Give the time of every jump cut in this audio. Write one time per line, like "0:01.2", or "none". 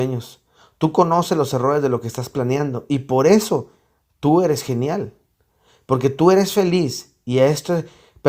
none